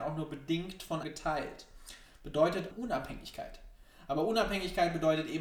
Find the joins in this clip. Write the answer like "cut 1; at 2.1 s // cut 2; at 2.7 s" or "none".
cut 1; at 1.0 s // cut 2; at 2.7 s

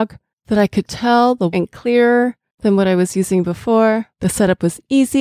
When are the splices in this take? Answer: cut 1; at 1.5 s // cut 2; at 4.1 s

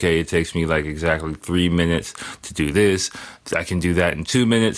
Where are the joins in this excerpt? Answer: none

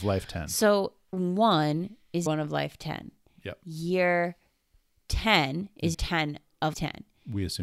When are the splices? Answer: cut 1; at 1.1 s // cut 2; at 2.3 s // cut 3; at 5.9 s // cut 4; at 6.7 s

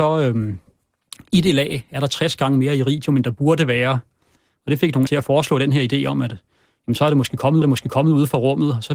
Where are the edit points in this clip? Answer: cut 1; at 5.1 s // cut 2; at 7.6 s

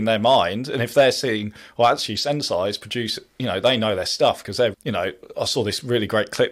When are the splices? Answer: cut 1; at 4.7 s

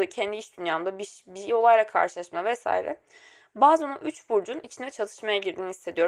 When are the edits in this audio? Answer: none

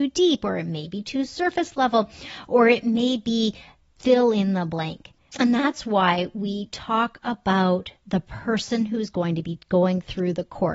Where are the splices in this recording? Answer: none

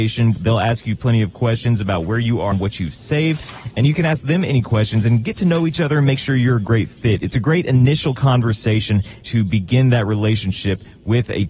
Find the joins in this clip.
cut 1; at 2.5 s // cut 2; at 9.2 s

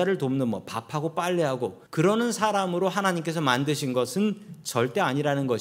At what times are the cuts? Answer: cut 1; at 1.9 s

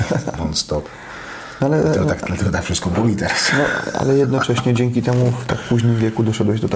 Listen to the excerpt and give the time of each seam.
none

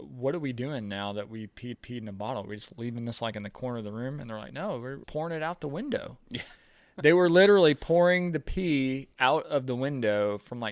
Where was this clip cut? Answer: cut 1; at 1.7 s // cut 2; at 5.0 s // cut 3; at 6.6 s // cut 4; at 9.1 s

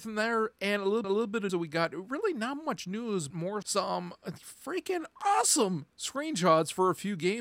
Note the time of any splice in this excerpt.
cut 1; at 1.0 s // cut 2; at 1.5 s // cut 3; at 3.3 s // cut 4; at 3.6 s // cut 5; at 5.1 s

